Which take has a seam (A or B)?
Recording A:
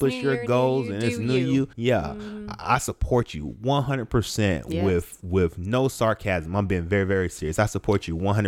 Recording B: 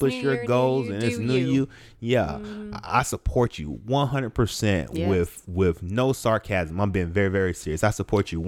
A